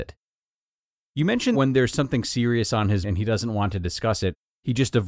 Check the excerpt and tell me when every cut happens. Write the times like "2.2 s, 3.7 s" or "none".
1.5 s, 3.0 s